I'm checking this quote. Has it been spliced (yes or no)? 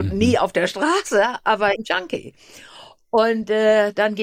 yes